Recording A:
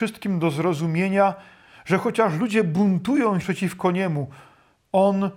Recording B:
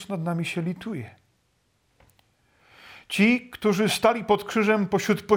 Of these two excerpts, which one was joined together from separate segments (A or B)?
A